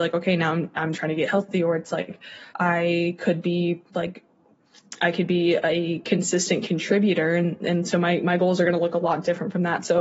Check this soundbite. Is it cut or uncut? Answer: cut